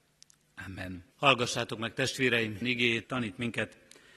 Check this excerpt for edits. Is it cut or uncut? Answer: cut